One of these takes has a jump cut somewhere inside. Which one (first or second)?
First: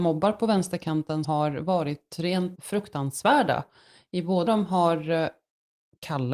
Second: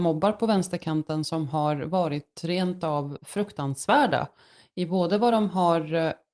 first